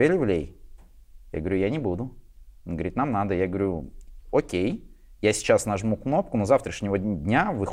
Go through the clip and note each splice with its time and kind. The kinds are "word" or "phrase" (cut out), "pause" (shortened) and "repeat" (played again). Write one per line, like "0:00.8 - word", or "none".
none